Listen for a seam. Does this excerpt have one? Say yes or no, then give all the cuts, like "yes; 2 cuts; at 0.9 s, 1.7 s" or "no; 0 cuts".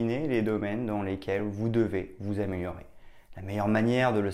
no; 0 cuts